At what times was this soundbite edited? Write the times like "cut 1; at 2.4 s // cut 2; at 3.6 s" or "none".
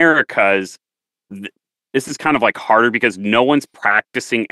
none